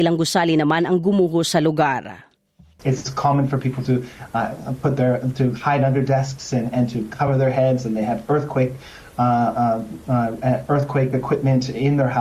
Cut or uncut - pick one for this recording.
uncut